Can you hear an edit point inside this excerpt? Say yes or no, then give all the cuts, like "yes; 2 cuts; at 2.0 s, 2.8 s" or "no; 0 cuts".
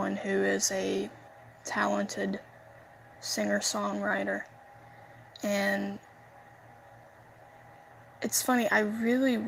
yes; 1 cut; at 2.9 s